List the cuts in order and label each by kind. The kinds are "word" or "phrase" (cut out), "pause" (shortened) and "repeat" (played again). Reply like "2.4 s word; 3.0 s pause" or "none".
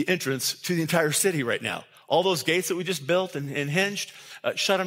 none